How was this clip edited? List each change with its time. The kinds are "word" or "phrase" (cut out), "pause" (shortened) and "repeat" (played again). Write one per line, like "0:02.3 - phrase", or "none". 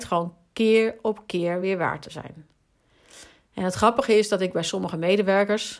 none